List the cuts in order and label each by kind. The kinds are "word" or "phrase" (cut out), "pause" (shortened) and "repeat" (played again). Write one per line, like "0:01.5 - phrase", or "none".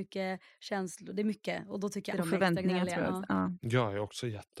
0:02.1 - word